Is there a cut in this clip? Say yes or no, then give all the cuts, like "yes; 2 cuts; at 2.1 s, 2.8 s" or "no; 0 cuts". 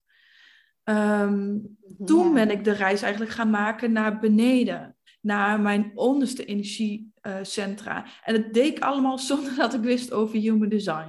yes; 1 cut; at 5.1 s